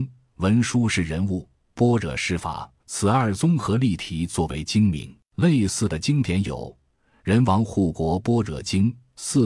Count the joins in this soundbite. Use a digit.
2